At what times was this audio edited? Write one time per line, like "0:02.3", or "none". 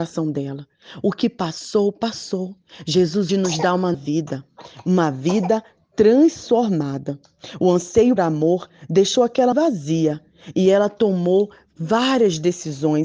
0:03.3
0:03.9
0:08.2
0:09.5